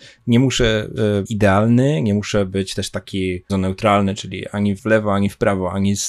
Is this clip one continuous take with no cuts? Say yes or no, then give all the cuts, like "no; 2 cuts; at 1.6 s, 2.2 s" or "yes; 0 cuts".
no; 3 cuts; at 1.3 s, 3.5 s, 4.8 s